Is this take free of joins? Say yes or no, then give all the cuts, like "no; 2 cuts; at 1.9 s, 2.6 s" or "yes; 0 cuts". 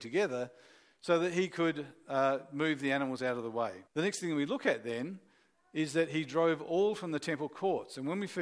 no; 1 cut; at 3.9 s